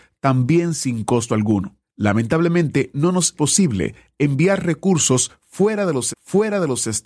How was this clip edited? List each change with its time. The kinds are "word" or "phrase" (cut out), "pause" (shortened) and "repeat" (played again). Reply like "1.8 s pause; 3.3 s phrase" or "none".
1.8 s pause; 3.3 s word; 6.1 s repeat